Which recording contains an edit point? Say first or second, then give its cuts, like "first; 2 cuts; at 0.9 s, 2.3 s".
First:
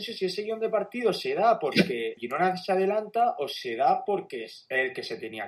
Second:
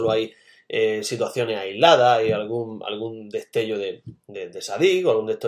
first; 1 cut; at 2.2 s